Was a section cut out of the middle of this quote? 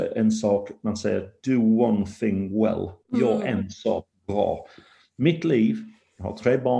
yes; 1 cut; at 3.0 s

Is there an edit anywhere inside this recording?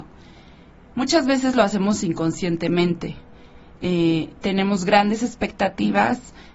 no; 0 cuts

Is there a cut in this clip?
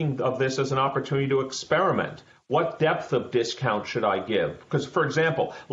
no; 0 cuts

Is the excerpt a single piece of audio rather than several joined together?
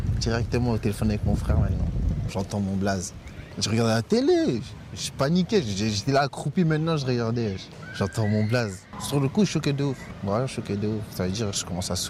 yes; 0 cuts

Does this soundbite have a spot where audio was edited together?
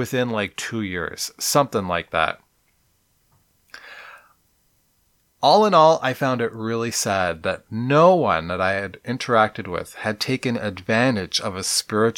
no; 0 cuts

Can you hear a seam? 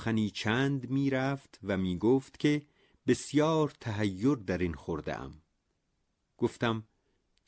no; 0 cuts

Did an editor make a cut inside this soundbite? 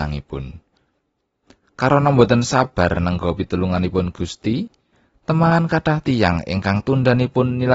no; 0 cuts

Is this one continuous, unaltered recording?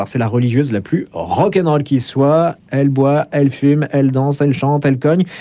yes; 0 cuts

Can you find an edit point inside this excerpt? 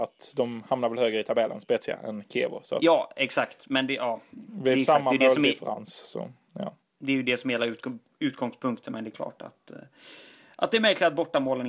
no; 0 cuts

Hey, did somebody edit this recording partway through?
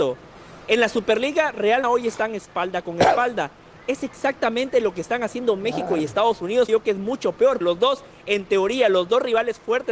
yes; 3 cuts; at 1.8 s, 6.7 s, 7.6 s

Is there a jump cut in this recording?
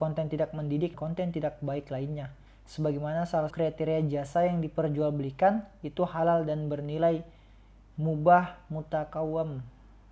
yes; 2 cuts; at 0.9 s, 3.5 s

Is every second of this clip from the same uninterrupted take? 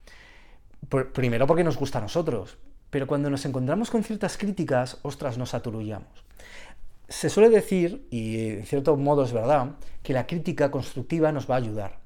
yes; 0 cuts

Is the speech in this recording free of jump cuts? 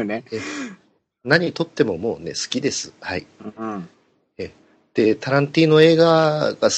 yes; 0 cuts

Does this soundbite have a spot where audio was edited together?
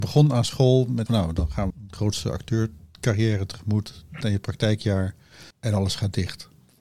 yes; 4 cuts; at 1.1 s, 1.7 s, 4.2 s, 5.5 s

